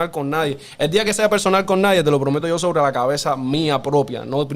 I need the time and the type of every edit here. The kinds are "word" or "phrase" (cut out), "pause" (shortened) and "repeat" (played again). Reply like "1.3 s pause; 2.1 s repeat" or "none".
none